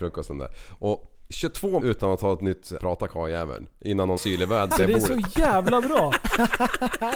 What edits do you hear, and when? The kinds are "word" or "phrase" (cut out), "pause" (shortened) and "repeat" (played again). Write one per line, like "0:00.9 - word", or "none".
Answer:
0:01.8 - word
0:02.8 - word
0:04.2 - phrase
0:04.7 - word